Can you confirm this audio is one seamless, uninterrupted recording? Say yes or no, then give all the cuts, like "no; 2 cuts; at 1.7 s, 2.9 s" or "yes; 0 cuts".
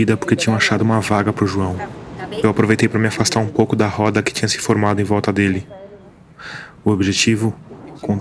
yes; 0 cuts